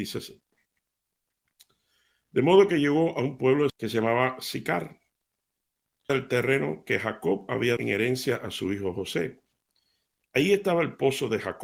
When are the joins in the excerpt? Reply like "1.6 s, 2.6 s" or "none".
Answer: 3.7 s, 6.1 s, 7.8 s